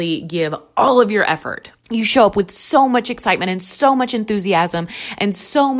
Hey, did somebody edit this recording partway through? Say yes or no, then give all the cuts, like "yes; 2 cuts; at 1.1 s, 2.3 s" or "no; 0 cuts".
yes; 1 cut; at 1.8 s